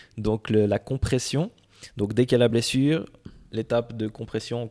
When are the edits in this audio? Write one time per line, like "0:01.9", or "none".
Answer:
none

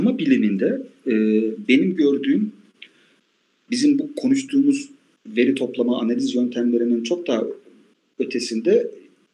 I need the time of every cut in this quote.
none

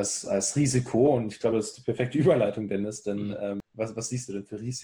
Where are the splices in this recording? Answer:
none

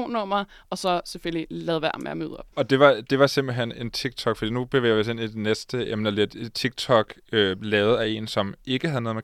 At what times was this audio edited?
0:02.5

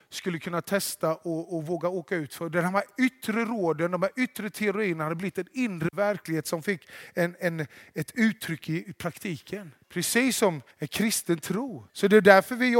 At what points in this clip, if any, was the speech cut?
0:09.8
0:10.7
0:11.9

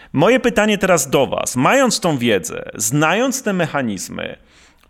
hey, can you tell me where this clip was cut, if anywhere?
none

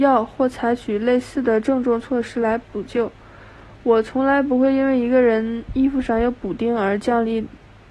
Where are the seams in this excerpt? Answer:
none

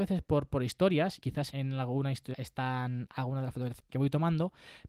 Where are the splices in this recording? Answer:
0:01.2
0:01.5
0:02.3
0:03.9

